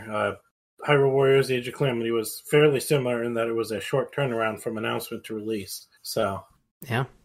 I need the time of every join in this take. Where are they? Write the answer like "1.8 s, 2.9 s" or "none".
6.0 s